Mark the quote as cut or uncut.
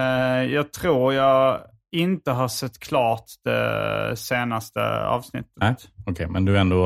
uncut